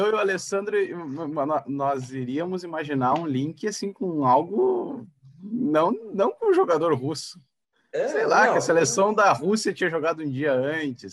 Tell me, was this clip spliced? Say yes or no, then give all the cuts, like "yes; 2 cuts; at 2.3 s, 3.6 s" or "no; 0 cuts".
no; 0 cuts